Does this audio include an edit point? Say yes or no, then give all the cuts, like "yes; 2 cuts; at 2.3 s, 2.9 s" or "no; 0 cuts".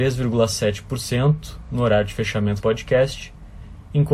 yes; 1 cut; at 2.6 s